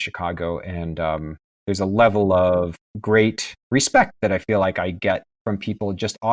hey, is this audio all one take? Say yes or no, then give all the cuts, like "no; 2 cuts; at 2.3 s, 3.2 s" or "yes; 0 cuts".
no; 1 cut; at 3.6 s